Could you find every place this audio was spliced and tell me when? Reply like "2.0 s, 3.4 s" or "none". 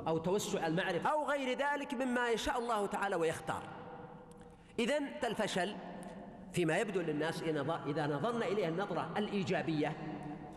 1.0 s, 5.2 s

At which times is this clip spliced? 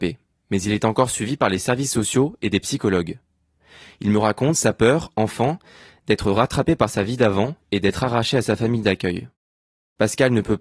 none

